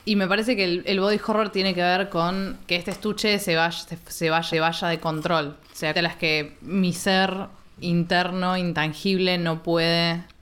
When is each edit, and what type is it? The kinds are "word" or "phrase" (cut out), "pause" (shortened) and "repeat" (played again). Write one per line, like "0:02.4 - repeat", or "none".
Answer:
0:02.7 - word
0:04.5 - repeat
0:05.6 - pause
0:06.0 - phrase